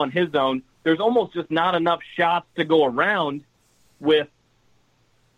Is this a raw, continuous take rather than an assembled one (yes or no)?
yes